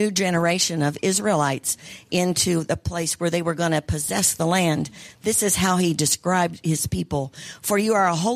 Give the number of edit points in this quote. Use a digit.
0